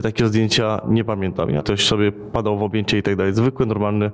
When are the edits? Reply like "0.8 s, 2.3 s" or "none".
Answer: 1.6 s